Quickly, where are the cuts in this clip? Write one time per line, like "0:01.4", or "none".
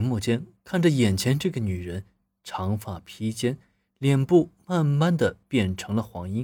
none